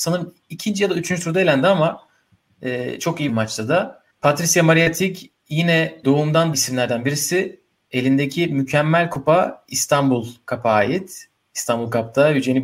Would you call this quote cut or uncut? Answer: cut